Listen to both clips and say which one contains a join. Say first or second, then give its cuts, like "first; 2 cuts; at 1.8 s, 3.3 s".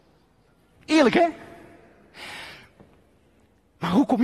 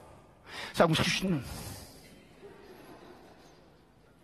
second; 1 cut; at 1.0 s